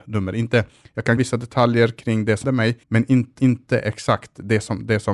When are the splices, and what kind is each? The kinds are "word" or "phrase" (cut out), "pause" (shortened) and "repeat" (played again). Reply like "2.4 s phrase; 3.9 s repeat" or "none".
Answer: 1.2 s word; 2.4 s word; 2.8 s pause; 3.4 s repeat